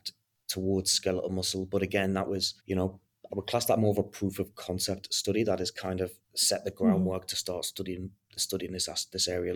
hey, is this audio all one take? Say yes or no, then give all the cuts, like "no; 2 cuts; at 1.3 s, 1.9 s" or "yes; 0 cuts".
no; 4 cuts; at 2.6 s, 3.3 s, 6.2 s, 8.4 s